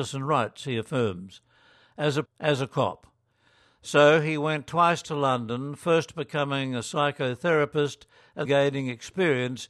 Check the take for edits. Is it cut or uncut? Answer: cut